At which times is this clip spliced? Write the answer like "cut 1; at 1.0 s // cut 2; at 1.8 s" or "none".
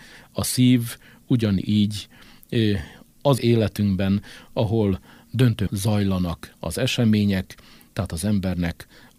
cut 1; at 3.4 s // cut 2; at 5.7 s